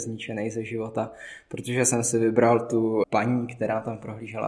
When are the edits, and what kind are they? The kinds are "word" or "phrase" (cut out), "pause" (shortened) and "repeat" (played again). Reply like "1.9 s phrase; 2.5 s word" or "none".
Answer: 3.0 s word